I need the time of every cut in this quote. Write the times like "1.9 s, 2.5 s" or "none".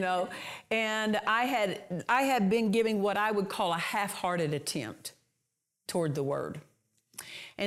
none